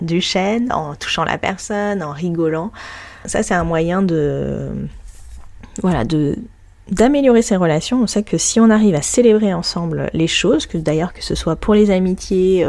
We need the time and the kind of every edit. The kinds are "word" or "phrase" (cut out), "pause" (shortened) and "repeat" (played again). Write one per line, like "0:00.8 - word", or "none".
none